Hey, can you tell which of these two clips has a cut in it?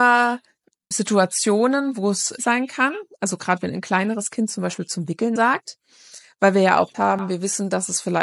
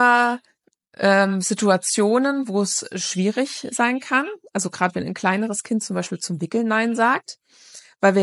first; 4 cuts; at 0.9 s, 2.4 s, 5.4 s, 6.9 s

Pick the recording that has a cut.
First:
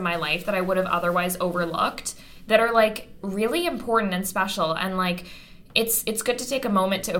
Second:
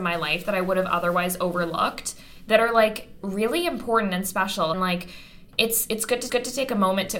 second; 2 cuts; at 4.7 s, 6.3 s

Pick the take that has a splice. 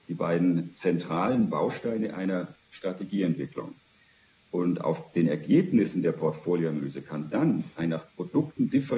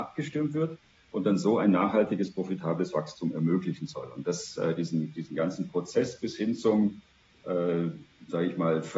first; 1 cut; at 2.7 s

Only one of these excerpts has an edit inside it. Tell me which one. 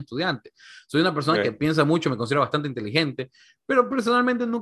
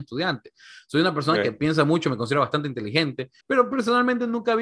second; 1 cut; at 3.4 s

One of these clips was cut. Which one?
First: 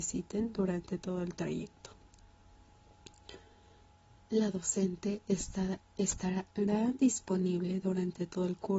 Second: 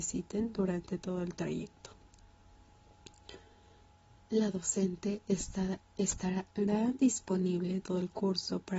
second; 1 cut; at 7.8 s

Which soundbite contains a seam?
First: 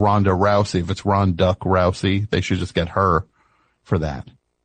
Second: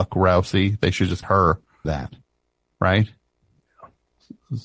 second; 2 cuts; at 1.2 s, 1.8 s

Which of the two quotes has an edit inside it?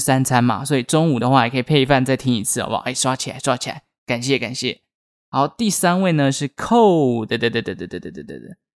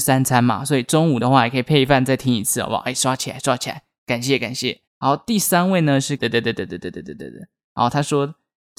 second; 2 cuts; at 4.9 s, 6.2 s

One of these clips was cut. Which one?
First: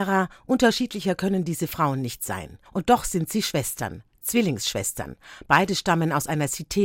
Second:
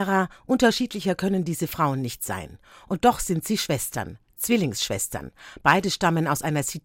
first; 1 cut; at 2.7 s

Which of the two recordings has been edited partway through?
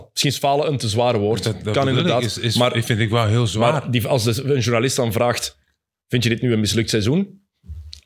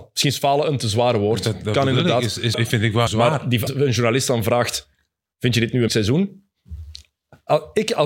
second; 4 cuts; at 2.5 s, 3.1 s, 3.7 s, 5.9 s

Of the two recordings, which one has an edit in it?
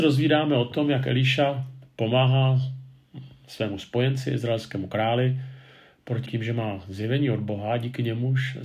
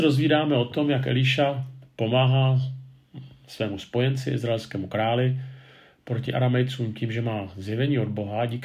first; 1 cut; at 6.3 s

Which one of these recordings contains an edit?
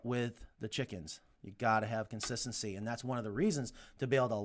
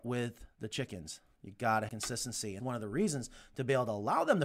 second; 2 cuts; at 1.9 s, 2.6 s

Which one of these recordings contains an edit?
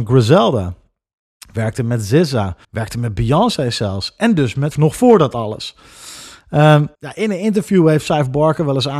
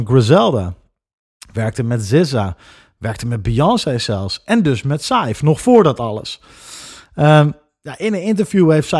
first; 3 cuts; at 2.6 s, 4.7 s, 6.9 s

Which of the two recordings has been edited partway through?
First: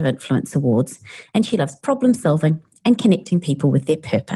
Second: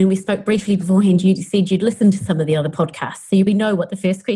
second; 1 cut; at 3.5 s

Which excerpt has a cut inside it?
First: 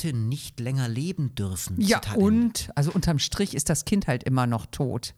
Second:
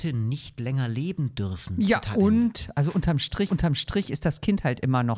second; 1 cut; at 3.5 s

